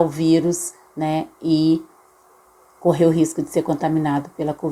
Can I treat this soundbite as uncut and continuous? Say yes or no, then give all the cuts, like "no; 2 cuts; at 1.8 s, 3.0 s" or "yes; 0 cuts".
yes; 0 cuts